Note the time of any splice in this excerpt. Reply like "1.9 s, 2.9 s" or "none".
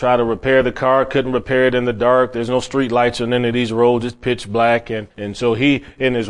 5.1 s